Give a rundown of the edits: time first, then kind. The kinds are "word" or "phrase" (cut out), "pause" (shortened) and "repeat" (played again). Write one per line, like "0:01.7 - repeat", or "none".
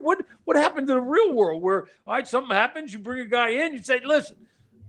none